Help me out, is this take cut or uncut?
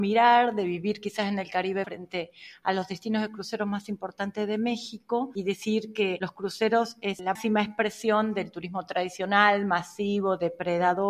cut